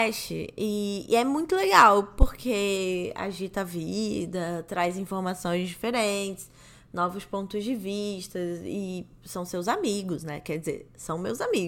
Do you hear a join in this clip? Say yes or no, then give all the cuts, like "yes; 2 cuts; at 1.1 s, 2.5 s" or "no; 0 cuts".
no; 0 cuts